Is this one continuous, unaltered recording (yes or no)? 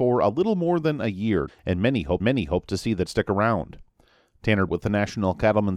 no